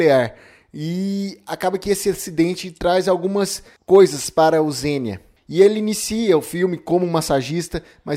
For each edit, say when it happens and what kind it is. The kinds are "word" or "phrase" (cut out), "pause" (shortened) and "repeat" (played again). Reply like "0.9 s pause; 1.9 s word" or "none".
none